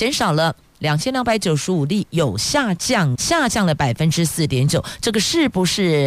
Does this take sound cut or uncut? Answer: cut